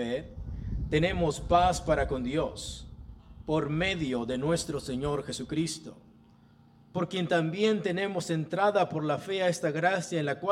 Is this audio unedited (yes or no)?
yes